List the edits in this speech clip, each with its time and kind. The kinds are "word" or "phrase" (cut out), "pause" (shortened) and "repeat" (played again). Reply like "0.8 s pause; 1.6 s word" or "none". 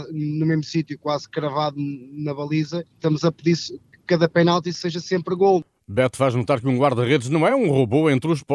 none